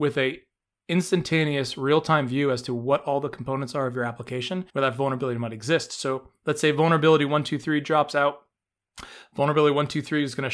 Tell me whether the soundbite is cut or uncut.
cut